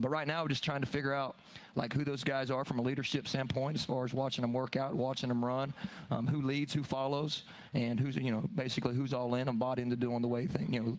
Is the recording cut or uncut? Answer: uncut